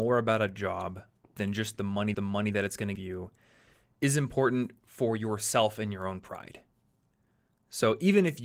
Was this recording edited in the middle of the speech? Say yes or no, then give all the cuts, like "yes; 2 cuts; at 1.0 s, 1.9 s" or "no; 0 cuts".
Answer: yes; 3 cuts; at 1.2 s, 2.1 s, 3.0 s